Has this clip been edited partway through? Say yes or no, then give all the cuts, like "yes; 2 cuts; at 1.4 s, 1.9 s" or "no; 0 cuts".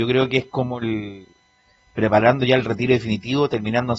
no; 0 cuts